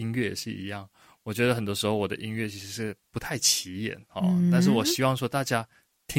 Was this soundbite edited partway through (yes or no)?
no